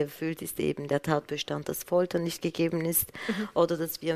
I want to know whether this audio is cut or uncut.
uncut